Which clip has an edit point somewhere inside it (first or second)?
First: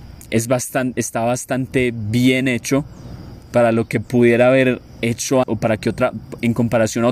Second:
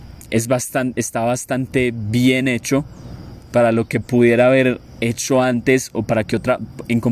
first